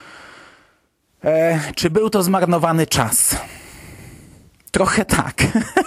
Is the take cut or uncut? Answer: uncut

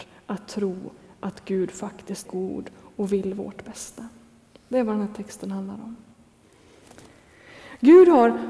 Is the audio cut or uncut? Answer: cut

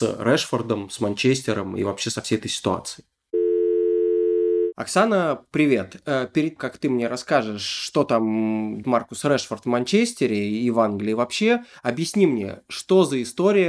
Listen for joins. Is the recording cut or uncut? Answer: cut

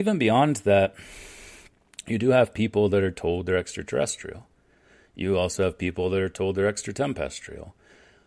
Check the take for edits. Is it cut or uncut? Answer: uncut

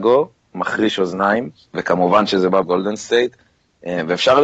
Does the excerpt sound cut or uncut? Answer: cut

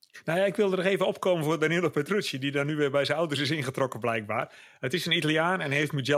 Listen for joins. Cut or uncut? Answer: uncut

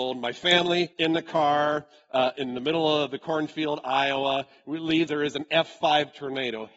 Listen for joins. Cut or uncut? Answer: cut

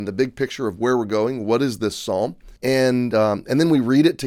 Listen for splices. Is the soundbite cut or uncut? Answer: cut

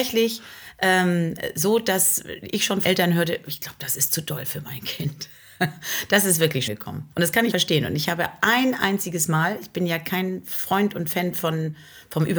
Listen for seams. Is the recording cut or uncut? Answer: cut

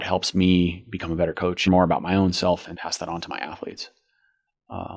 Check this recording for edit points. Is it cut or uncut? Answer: cut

